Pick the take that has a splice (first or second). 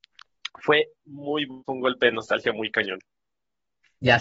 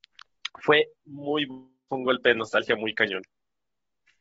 first